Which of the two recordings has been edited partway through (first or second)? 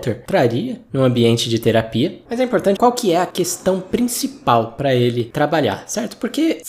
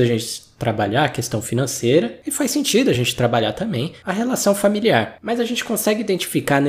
first